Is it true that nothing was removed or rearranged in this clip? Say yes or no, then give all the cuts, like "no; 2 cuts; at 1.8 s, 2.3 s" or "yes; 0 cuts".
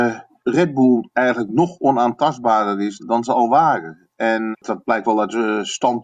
no; 3 cuts; at 3.0 s, 4.5 s, 5.0 s